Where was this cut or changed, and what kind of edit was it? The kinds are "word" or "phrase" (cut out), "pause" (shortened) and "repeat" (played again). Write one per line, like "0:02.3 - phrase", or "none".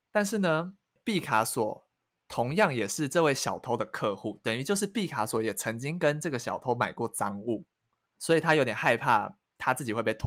0:08.2 - word